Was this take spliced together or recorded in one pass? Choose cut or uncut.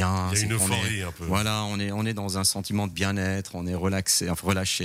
uncut